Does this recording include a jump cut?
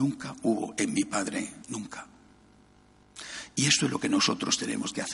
yes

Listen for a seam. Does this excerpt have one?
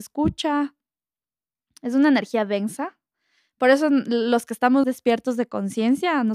yes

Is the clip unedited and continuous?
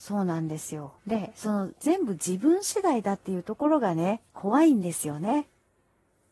no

